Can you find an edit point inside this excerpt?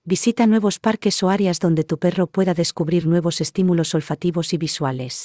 no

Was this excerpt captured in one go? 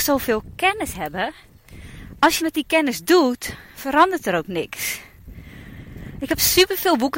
no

